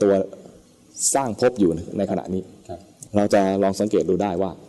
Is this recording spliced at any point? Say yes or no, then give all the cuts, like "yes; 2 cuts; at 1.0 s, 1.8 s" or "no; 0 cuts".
yes; 1 cut; at 3.1 s